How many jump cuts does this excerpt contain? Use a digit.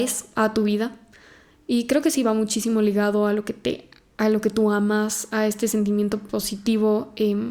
0